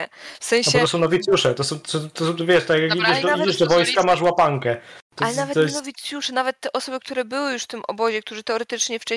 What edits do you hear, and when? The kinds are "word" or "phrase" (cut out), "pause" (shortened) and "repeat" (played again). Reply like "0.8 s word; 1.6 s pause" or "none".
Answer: none